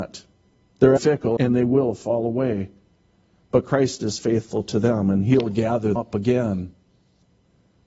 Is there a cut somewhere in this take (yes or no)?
yes